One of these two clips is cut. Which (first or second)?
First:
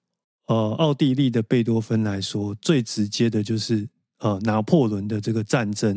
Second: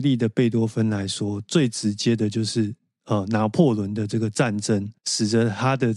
second